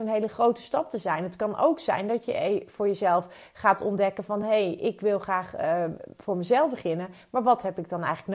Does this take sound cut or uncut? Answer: uncut